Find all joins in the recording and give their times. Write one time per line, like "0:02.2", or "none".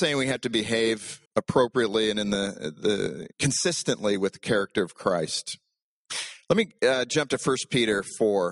0:01.3
0:03.3